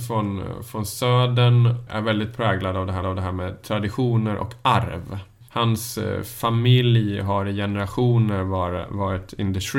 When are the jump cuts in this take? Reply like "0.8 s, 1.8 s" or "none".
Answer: 1.9 s, 3.0 s, 5.5 s